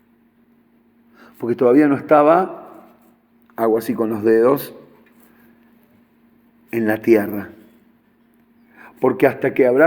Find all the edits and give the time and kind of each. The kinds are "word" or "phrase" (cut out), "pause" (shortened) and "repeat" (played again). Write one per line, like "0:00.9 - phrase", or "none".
none